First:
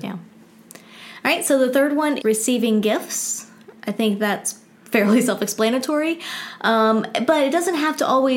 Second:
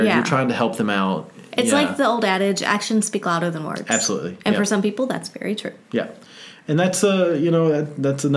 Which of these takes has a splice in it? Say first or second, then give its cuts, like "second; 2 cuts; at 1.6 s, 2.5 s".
first; 1 cut; at 2.2 s